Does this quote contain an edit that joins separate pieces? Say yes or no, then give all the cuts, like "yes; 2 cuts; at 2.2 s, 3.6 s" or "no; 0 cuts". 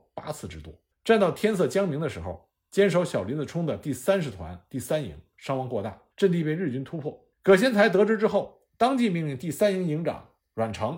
yes; 3 cuts; at 0.9 s, 6.1 s, 7.3 s